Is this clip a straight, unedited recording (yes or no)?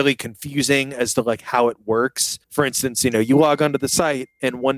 no